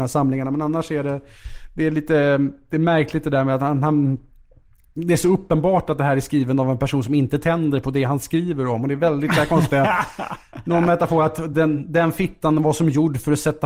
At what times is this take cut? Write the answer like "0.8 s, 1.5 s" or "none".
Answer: none